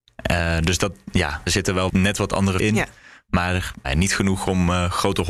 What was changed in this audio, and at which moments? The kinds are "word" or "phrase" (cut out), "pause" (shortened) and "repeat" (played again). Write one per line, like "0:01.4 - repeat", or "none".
0:01.5 - word
0:01.9 - word
0:02.6 - word
0:03.8 - word